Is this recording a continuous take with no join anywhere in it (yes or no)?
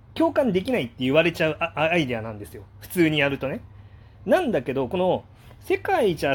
yes